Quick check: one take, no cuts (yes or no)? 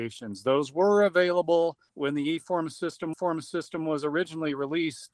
no